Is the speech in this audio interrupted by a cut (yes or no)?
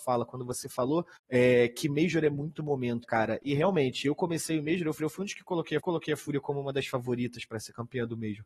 yes